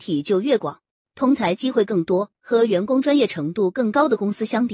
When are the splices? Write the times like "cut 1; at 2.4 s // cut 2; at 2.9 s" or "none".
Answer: cut 1; at 2.3 s